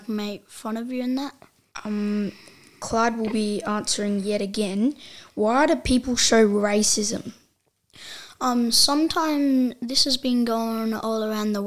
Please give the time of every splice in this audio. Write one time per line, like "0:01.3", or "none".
none